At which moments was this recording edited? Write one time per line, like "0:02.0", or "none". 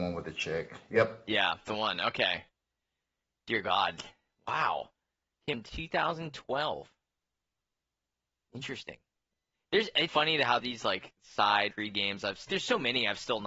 0:01.7
0:05.5
0:10.1
0:10.6
0:11.7
0:12.5